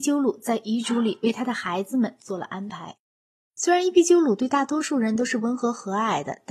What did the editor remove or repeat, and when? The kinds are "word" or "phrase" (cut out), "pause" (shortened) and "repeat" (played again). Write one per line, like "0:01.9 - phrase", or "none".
0:03.2 - pause